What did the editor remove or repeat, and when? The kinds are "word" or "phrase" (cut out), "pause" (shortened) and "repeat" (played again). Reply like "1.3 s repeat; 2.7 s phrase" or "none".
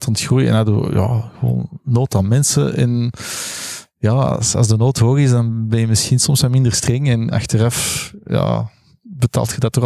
7.3 s word